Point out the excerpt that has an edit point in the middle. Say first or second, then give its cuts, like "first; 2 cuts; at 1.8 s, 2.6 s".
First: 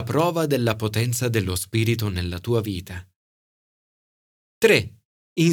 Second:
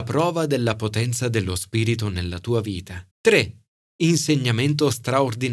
second; 1 cut; at 3.1 s